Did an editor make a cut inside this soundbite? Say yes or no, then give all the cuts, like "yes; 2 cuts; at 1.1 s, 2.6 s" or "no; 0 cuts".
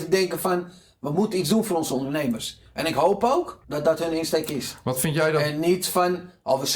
yes; 1 cut; at 3.6 s